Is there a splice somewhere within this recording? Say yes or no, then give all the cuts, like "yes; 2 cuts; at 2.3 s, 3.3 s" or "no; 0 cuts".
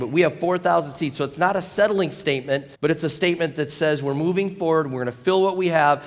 yes; 1 cut; at 2.8 s